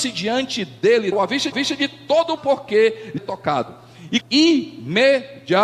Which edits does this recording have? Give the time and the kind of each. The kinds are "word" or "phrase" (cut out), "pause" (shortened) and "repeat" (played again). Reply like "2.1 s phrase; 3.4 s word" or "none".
1.1 s word; 1.5 s repeat; 2.4 s phrase; 3.2 s word; 4.2 s word